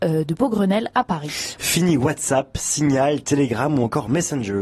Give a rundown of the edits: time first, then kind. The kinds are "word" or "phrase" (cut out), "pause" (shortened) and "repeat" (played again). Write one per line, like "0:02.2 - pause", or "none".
none